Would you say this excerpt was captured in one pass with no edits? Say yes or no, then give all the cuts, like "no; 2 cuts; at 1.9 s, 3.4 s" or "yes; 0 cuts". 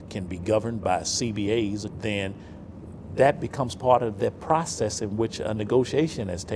no; 1 cut; at 1.9 s